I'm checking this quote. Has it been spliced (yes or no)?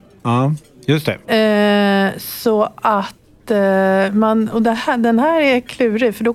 yes